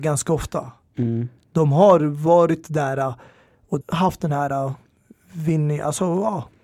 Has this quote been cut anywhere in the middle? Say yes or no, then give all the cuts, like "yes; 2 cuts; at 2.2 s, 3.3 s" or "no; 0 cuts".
yes; 1 cut; at 3.8 s